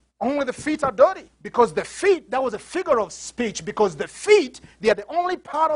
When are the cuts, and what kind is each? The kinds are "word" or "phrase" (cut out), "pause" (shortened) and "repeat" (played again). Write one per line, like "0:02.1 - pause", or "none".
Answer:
0:01.3 - pause